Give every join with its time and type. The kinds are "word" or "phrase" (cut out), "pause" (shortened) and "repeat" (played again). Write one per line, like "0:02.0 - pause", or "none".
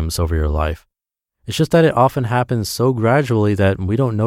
none